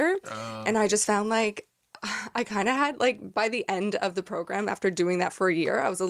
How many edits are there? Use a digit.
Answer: 0